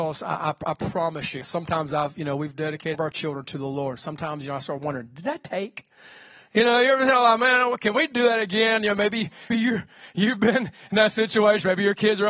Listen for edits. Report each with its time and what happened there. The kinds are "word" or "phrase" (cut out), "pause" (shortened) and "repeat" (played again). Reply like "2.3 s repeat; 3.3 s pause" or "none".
1.4 s word; 2.9 s word; 9.5 s word